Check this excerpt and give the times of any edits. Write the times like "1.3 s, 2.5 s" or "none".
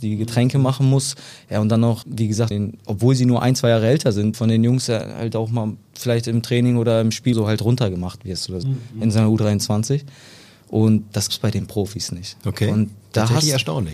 2.0 s, 2.5 s, 4.3 s, 7.3 s, 8.6 s, 11.3 s